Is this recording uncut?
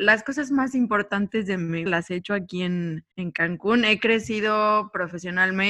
no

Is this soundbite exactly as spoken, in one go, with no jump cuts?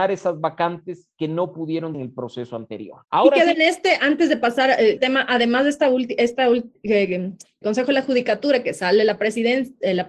no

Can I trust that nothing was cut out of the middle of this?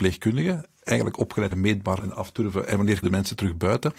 no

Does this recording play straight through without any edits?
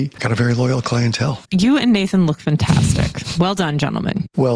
yes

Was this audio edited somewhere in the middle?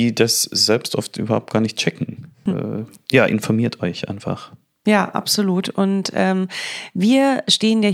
no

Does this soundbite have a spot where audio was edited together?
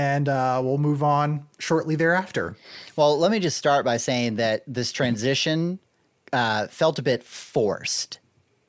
no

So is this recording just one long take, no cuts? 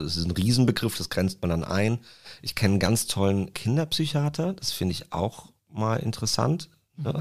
no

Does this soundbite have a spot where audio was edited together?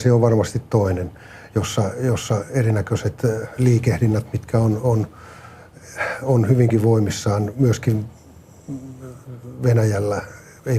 no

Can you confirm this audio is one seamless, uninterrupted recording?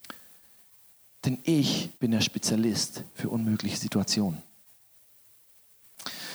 no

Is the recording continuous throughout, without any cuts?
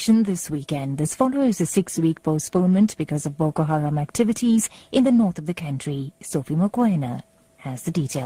yes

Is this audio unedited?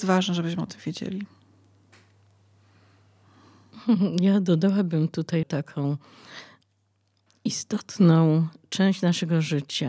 no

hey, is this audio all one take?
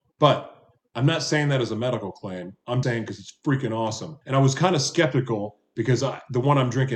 no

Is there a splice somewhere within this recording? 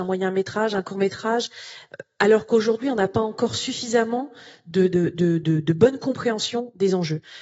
no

